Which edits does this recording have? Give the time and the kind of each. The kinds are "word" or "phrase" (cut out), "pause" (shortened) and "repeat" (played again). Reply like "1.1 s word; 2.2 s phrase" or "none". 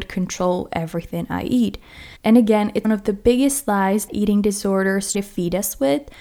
2.2 s pause; 2.8 s word; 4.1 s word; 5.1 s word